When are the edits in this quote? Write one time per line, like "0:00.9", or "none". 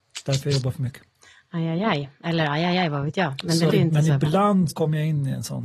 0:03.7
0:04.7